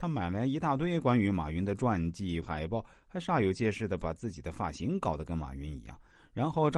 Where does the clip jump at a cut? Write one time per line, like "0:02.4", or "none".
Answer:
0:02.4

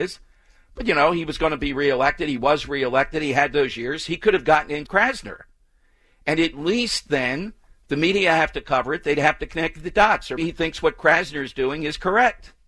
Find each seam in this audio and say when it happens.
0:04.9
0:07.7
0:10.4

